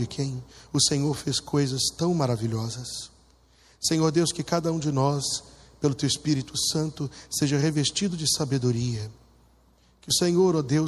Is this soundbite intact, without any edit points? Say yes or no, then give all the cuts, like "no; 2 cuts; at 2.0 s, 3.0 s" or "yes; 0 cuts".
yes; 0 cuts